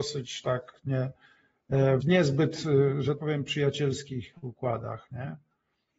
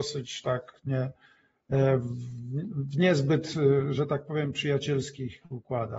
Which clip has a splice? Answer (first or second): first